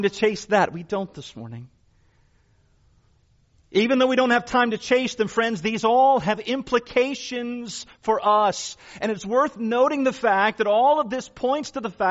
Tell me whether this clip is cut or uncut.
uncut